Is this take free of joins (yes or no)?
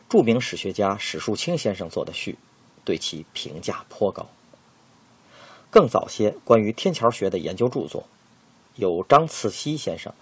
yes